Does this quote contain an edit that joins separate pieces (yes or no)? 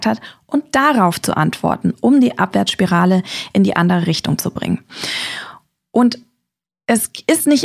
no